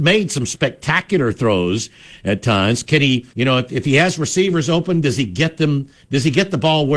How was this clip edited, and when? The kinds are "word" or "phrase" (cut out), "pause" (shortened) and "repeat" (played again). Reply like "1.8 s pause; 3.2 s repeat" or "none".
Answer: 3.3 s pause